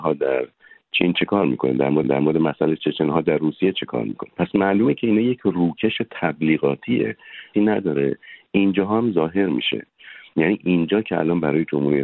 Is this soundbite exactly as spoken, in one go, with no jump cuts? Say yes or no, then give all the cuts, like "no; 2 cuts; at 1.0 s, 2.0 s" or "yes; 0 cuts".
no; 2 cuts; at 2.0 s, 7.5 s